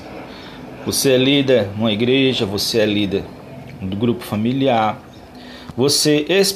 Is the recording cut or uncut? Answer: uncut